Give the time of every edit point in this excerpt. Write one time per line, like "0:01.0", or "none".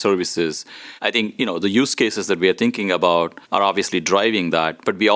0:01.0
0:03.4